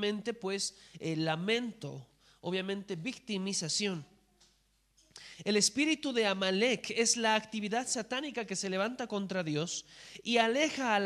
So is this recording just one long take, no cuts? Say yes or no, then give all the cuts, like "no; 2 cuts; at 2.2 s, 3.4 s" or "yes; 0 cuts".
yes; 0 cuts